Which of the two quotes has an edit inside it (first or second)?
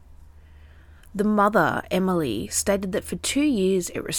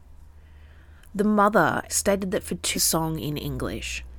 second